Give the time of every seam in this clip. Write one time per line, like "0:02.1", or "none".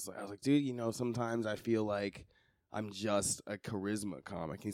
none